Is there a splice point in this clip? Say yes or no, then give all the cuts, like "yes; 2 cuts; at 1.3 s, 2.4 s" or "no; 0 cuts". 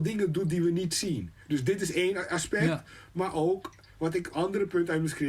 yes; 2 cuts; at 1.4 s, 4.3 s